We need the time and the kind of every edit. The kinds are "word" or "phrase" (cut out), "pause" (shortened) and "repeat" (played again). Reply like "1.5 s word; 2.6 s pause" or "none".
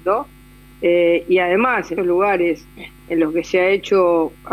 2.0 s word